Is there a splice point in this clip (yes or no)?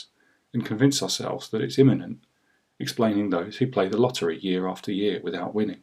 no